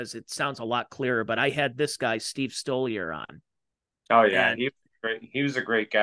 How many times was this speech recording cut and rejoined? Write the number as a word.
zero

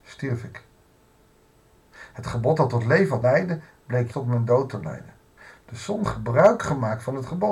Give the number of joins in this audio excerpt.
four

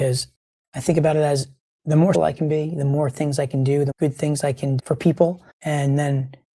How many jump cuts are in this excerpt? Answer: four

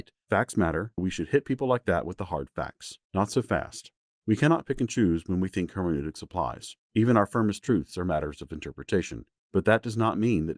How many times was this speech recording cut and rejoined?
three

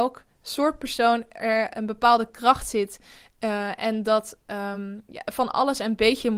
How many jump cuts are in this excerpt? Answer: zero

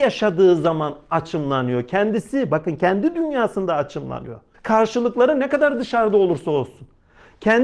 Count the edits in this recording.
one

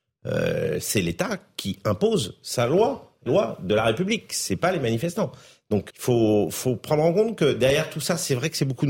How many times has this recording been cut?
two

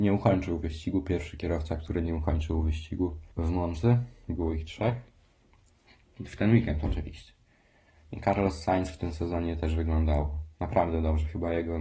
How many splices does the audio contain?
one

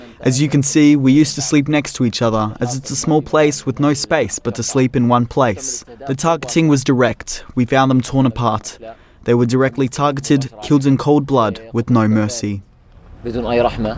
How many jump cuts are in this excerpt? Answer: zero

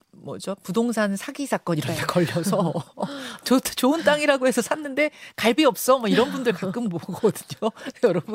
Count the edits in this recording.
one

